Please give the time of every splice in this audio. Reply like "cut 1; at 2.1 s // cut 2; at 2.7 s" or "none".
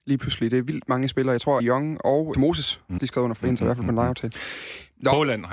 cut 1; at 1.6 s // cut 2; at 2.3 s // cut 3; at 3.0 s // cut 4; at 3.4 s